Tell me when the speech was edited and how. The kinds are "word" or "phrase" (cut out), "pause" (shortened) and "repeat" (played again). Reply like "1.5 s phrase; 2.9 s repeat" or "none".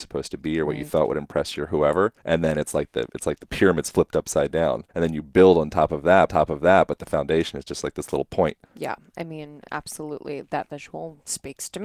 2.2 s pause; 4.9 s pause; 6.3 s repeat; 8.6 s pause